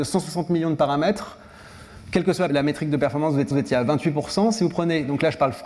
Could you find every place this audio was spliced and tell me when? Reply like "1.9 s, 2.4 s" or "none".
2.5 s, 3.5 s

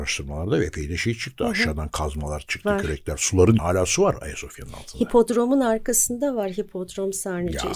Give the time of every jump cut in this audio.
3.6 s

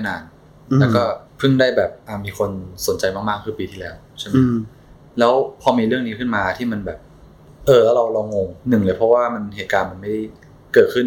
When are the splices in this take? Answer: 1.3 s, 8.6 s

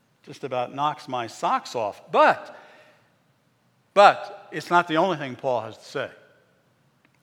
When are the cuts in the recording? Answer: none

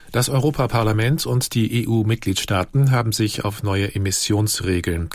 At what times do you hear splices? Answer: none

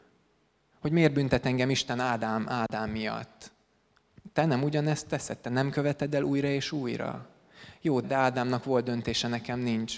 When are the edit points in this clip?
8.0 s

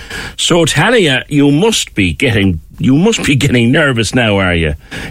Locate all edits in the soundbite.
none

